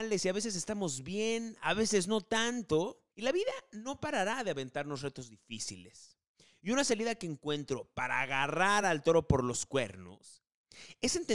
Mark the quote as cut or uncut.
uncut